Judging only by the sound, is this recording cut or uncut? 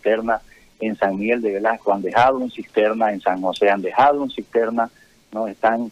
uncut